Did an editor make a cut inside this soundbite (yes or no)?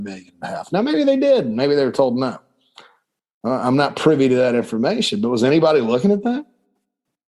no